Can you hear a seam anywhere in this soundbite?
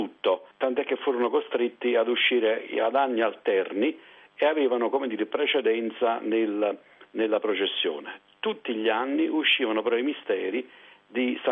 no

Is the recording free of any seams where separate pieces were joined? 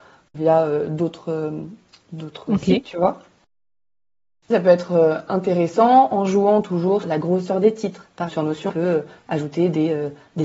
no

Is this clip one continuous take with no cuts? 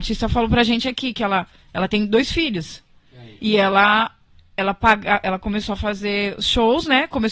yes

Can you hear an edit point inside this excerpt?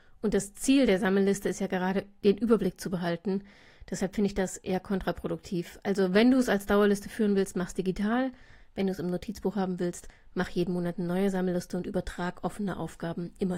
no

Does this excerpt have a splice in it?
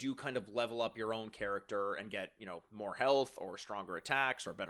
no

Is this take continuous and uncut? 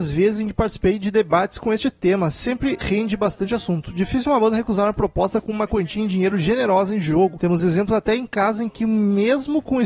yes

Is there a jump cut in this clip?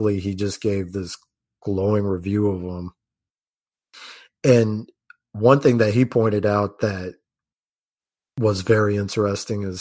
no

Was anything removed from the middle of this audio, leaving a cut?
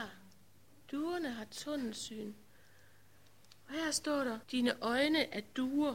yes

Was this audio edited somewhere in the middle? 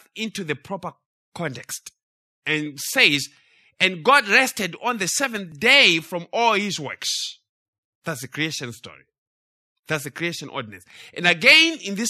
no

